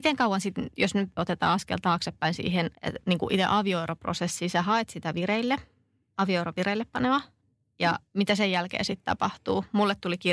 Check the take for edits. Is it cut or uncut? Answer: cut